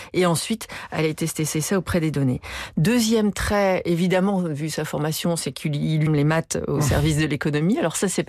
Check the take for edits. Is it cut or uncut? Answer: cut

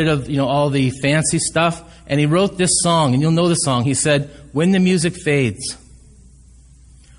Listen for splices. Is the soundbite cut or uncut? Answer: uncut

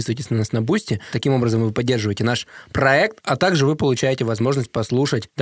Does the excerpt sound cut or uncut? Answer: uncut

